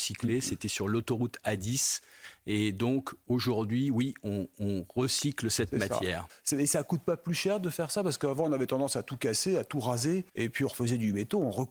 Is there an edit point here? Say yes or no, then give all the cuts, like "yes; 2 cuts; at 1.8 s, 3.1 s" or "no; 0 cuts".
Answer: yes; 1 cut; at 10.3 s